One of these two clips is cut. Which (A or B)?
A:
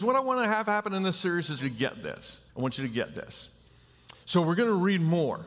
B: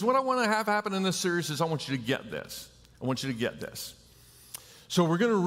A